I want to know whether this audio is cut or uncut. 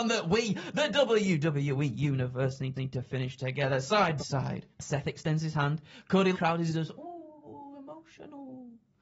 cut